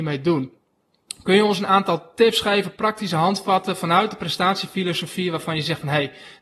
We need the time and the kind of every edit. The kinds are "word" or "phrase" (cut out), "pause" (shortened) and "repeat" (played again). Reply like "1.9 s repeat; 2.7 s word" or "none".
none